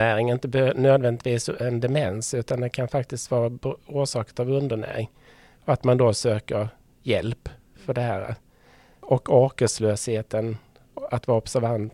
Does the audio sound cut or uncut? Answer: uncut